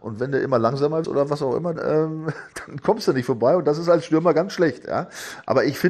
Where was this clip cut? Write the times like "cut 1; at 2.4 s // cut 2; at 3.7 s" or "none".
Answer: cut 1; at 1.0 s // cut 2; at 1.8 s